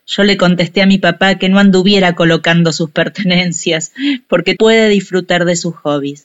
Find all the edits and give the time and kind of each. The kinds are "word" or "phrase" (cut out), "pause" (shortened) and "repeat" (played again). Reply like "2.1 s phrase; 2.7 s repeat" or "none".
4.6 s word